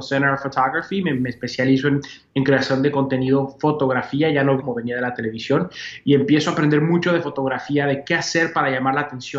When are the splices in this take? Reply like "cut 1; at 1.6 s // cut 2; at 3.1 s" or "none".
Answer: cut 1; at 4.6 s // cut 2; at 8.0 s